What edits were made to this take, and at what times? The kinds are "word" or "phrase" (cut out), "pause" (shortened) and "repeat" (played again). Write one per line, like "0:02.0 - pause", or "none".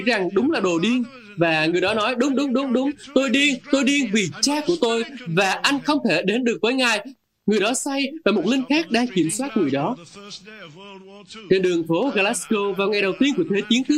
none